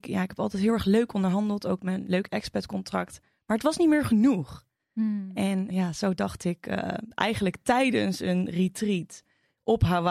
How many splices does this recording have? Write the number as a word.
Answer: one